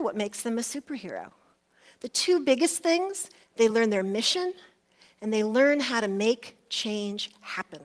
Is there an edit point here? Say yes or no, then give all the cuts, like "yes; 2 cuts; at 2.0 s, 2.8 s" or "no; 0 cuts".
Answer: no; 0 cuts